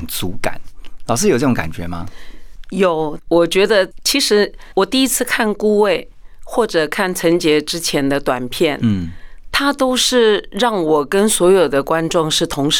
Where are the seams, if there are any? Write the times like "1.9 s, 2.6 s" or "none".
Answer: none